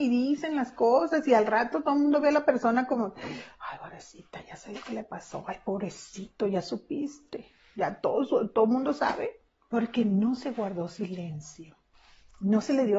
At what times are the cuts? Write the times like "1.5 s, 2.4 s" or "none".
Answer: 9.5 s